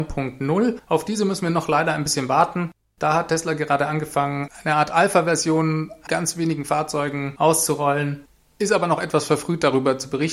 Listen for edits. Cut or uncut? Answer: cut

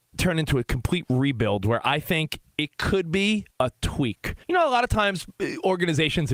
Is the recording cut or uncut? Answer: cut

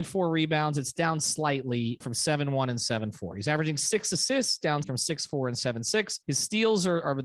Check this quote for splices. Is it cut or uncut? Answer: cut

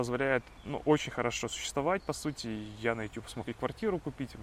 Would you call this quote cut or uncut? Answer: uncut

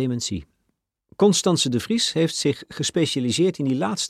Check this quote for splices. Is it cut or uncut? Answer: cut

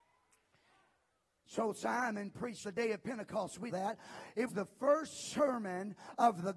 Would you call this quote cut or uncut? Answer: cut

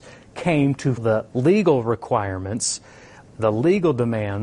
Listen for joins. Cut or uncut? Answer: cut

